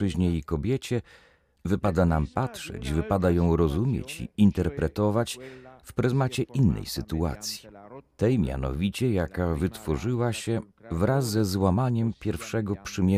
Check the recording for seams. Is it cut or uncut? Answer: uncut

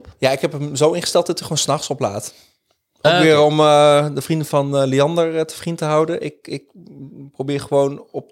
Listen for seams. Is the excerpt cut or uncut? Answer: uncut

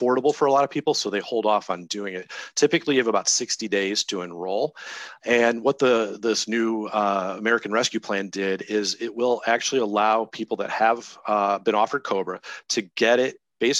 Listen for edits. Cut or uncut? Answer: uncut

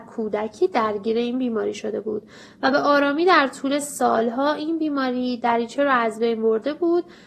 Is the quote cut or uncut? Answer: uncut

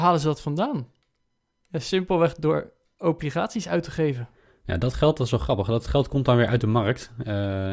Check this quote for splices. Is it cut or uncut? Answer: uncut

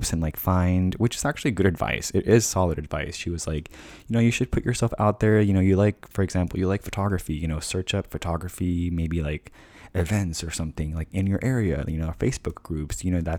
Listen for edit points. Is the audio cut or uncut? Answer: uncut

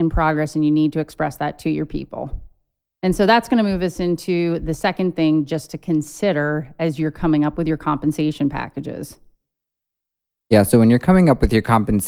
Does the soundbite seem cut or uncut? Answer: uncut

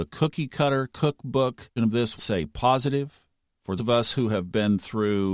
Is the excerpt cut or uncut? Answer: cut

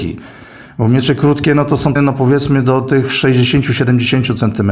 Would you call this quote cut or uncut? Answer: cut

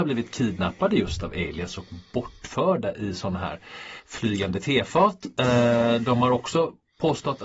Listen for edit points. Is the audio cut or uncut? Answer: uncut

